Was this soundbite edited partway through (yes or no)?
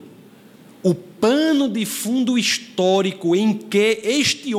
no